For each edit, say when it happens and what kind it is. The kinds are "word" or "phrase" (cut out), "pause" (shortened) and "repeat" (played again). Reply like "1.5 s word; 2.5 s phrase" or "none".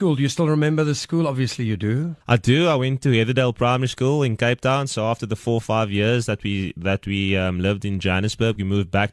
2.2 s pause